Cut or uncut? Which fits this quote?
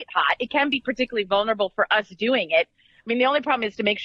uncut